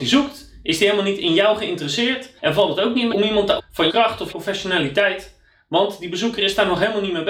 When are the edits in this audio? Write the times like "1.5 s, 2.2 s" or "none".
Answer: 2.4 s, 3.1 s, 3.6 s, 3.9 s, 4.3 s